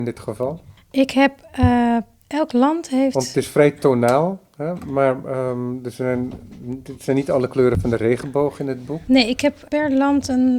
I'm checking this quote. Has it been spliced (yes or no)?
yes